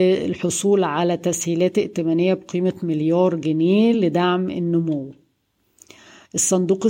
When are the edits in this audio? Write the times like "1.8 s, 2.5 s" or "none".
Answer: none